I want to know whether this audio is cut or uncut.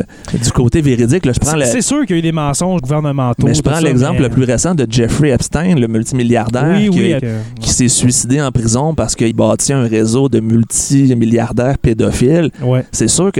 cut